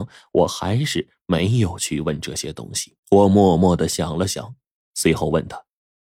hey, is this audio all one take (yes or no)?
no